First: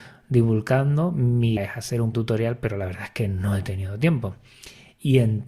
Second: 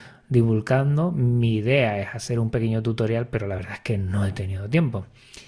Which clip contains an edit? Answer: first; 2 cuts; at 1.6 s, 2.1 s

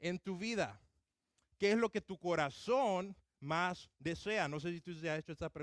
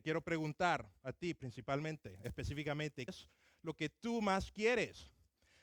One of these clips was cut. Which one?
second; 1 cut; at 3.1 s

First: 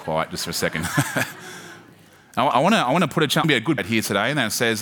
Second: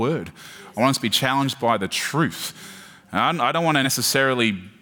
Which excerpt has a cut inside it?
first; 3 cuts; at 2.5 s, 3.4 s, 3.8 s

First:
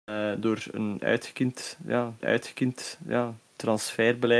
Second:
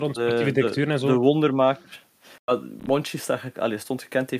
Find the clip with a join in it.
first; 1 cut; at 2.2 s

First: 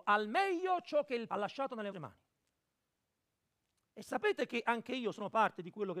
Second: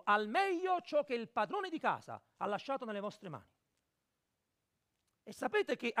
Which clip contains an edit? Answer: first; 2 cuts; at 1.3 s, 1.9 s

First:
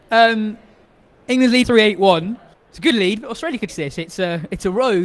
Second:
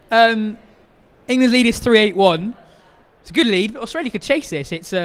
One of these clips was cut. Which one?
first; 3 cuts; at 1.6 s, 2.5 s, 3.7 s

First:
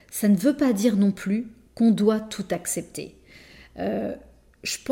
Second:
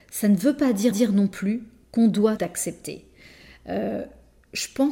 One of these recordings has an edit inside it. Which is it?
second; 2 cuts; at 0.9 s, 2.4 s

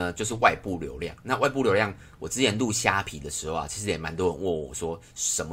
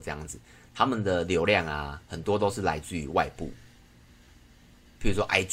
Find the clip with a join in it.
second; 1 cut; at 2.1 s

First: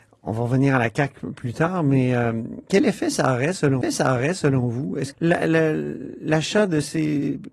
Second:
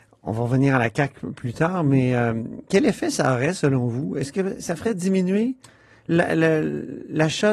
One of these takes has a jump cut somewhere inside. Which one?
first; 2 cuts; at 3.8 s, 5.1 s

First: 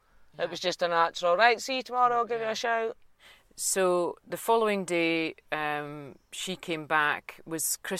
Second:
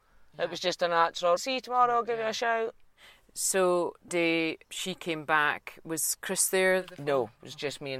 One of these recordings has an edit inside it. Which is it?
second; 3 cuts; at 1.4 s, 4.1 s, 4.6 s

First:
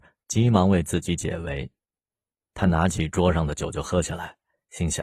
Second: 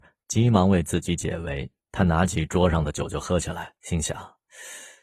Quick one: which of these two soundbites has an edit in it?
second; 2 cuts; at 1.8 s, 3.8 s

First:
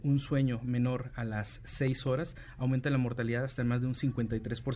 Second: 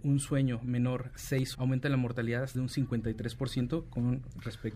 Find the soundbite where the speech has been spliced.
second; 3 cuts; at 1.2 s, 1.5 s, 2.5 s

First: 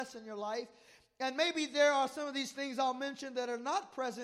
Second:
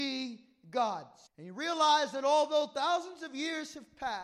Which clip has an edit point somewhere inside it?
second; 1 cut; at 1.3 s

